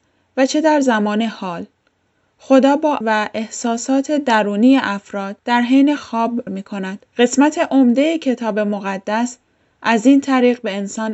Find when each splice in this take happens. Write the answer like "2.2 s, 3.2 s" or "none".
3.0 s, 5.4 s, 6.0 s, 6.5 s, 7.1 s